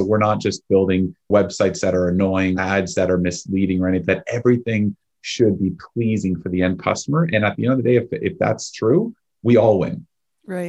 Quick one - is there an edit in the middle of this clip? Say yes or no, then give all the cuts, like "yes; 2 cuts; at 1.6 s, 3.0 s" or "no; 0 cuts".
yes; 2 cuts; at 2.5 s, 4.1 s